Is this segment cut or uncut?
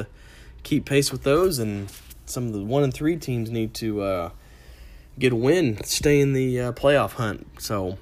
uncut